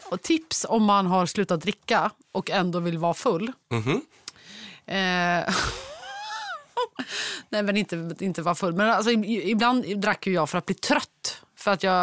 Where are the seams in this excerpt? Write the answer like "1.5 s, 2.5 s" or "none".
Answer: 3.6 s